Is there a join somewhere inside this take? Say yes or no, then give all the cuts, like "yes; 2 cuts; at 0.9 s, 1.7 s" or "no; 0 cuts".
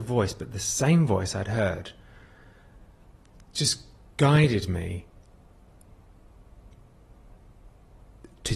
no; 0 cuts